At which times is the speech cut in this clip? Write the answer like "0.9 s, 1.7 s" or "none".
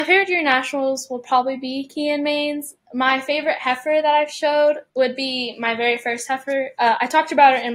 4.9 s